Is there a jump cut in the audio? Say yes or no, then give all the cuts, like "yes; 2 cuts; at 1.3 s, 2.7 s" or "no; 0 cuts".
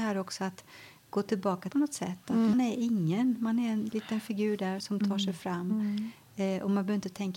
yes; 3 cuts; at 1.7 s, 2.5 s, 4.8 s